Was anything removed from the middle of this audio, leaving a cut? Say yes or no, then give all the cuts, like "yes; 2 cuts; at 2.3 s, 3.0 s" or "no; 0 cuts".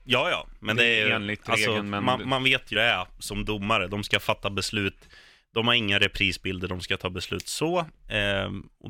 yes; 1 cut; at 2.7 s